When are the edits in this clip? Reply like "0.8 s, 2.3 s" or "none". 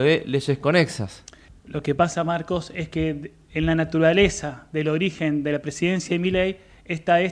1.5 s